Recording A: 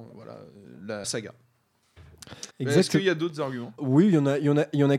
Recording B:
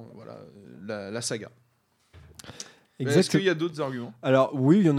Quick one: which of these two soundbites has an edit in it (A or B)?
A